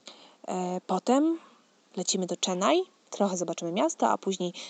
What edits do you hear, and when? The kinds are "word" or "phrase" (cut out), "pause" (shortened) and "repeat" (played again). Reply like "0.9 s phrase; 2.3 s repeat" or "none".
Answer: none

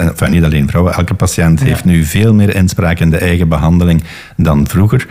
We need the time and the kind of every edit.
none

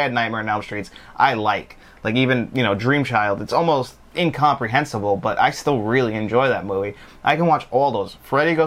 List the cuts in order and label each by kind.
none

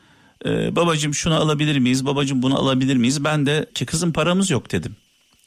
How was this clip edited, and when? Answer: 3.7 s word

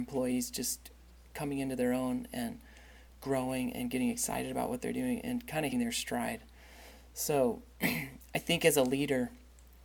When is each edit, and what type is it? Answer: 5.7 s word

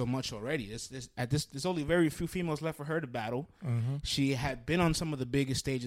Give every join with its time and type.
none

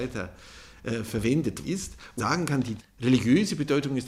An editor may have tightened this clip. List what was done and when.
1.6 s word; 2.2 s word; 2.8 s word

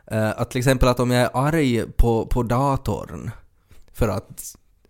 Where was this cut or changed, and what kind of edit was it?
none

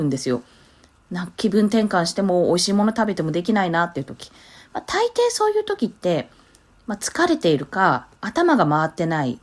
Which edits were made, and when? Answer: 8.2 s pause

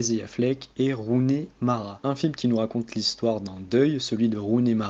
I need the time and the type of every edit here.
none

